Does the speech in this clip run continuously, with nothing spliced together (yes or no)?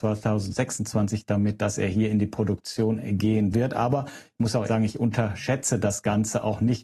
no